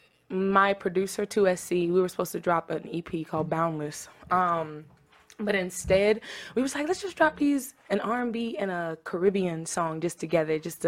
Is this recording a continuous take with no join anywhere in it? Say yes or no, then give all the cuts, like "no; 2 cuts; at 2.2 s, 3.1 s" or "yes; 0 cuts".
yes; 0 cuts